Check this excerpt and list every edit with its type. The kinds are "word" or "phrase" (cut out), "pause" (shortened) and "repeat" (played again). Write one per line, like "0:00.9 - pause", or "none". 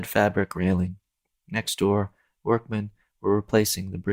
none